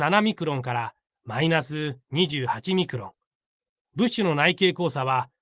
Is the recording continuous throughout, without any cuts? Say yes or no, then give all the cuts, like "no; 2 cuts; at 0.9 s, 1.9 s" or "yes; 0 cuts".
yes; 0 cuts